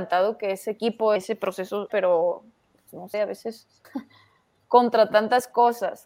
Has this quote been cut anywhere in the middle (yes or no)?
yes